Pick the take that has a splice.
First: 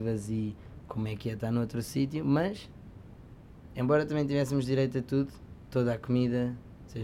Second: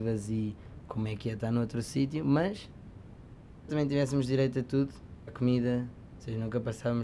second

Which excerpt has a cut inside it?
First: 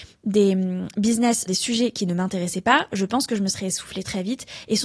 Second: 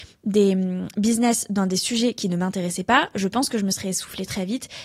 first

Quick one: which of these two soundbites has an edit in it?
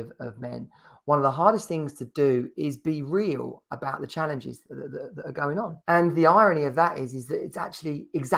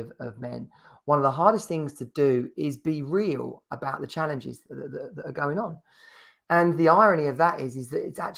first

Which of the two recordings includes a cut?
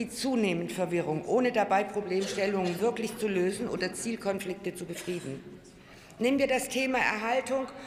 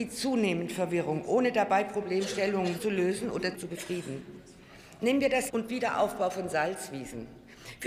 second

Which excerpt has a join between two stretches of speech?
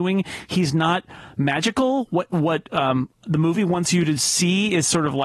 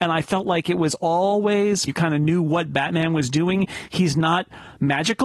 second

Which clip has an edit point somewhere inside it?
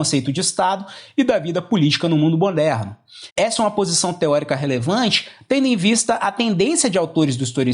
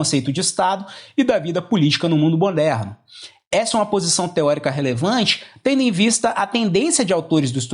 first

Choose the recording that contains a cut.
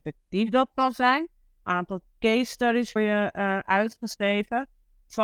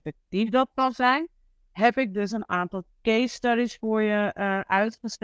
first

